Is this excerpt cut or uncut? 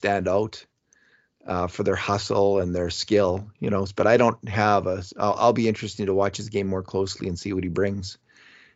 uncut